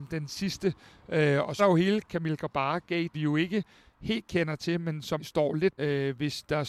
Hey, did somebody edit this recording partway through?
yes; 4 cuts; at 1.6 s, 3.1 s, 5.2 s, 5.8 s

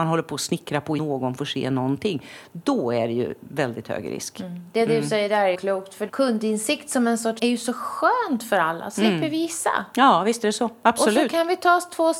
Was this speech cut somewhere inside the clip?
yes; 4 cuts; at 1.0 s, 5.5 s, 6.1 s, 7.4 s

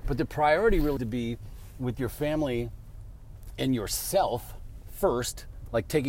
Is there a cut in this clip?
yes; 1 cut; at 1.0 s

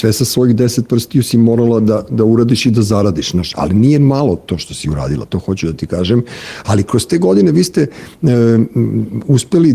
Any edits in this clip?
no; 0 cuts

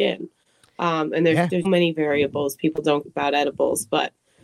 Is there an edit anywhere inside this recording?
yes; 2 cuts; at 1.6 s, 3.0 s

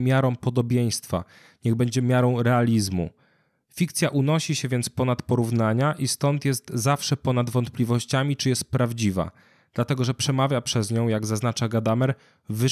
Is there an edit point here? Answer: no; 0 cuts

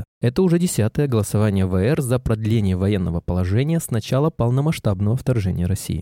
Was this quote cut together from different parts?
no; 0 cuts

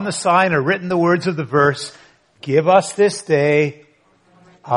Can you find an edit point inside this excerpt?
no; 0 cuts

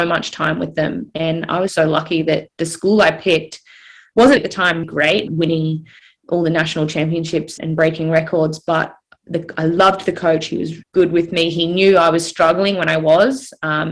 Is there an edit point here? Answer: yes; 6 cuts; at 1.7 s, 4.4 s, 4.8 s, 5.3 s, 7.6 s, 10.8 s

